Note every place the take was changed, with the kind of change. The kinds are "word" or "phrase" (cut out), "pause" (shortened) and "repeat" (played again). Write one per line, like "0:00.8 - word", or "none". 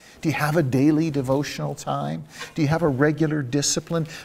none